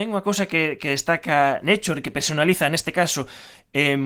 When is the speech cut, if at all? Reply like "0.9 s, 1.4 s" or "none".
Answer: none